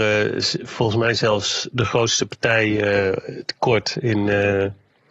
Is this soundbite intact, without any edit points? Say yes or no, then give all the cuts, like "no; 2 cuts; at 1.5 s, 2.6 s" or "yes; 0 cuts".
yes; 0 cuts